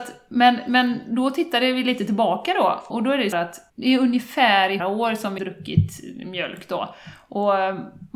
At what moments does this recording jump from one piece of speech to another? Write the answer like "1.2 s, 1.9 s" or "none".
2.9 s, 3.3 s, 3.7 s, 4.8 s, 5.4 s